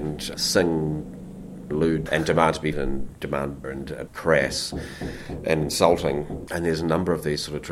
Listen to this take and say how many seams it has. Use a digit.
5